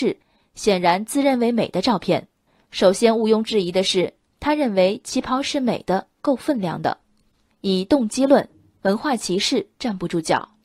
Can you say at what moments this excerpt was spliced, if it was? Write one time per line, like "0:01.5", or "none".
none